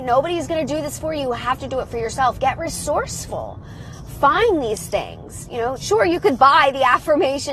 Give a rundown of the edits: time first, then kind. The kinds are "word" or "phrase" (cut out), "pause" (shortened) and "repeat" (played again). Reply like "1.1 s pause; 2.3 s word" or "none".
5.8 s word